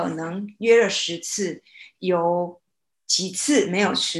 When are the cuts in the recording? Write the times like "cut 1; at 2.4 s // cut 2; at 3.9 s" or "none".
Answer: none